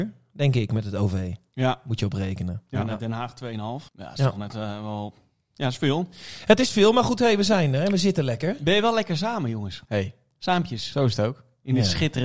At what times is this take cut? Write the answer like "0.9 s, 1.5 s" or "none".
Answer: 3.9 s, 9.8 s